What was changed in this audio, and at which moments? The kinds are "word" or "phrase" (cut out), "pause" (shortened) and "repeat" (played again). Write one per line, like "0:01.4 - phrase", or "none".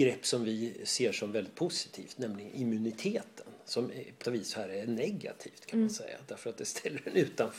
0:04.2 - word